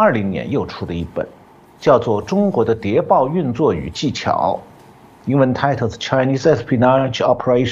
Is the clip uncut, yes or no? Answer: yes